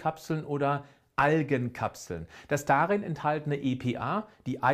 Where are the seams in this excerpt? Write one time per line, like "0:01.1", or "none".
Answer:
none